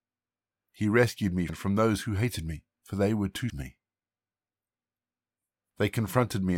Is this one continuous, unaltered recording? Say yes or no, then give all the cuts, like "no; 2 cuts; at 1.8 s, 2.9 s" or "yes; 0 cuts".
no; 3 cuts; at 1.5 s, 2.7 s, 3.5 s